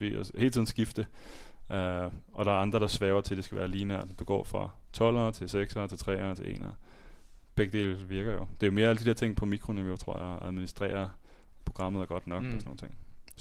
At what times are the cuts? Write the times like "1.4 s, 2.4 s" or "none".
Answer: none